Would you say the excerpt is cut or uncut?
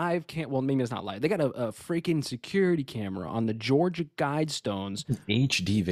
uncut